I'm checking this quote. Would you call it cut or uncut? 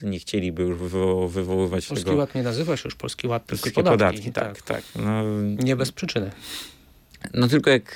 cut